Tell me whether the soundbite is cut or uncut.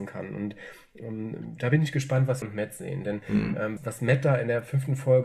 cut